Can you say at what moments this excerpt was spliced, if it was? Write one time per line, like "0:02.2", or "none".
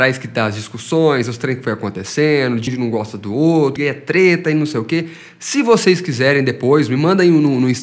0:02.7
0:03.8